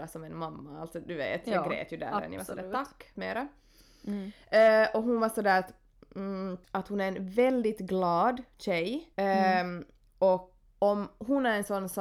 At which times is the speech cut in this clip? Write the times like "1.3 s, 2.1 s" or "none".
3.2 s, 6.6 s, 9.1 s, 10.7 s